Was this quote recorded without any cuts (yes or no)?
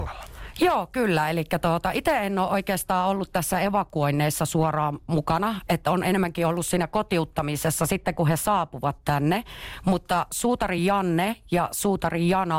yes